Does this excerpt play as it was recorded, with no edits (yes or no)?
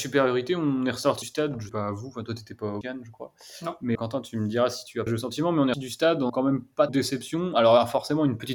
no